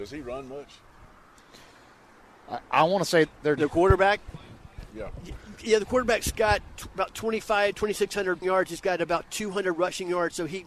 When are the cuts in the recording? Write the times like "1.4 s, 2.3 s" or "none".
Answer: 2.6 s, 3.6 s, 5.6 s, 6.7 s, 8.4 s